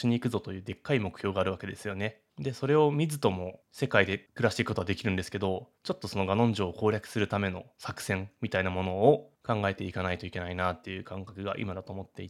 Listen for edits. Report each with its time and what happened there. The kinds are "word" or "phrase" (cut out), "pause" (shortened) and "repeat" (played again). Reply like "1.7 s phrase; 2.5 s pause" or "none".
2.3 s pause; 5.7 s pause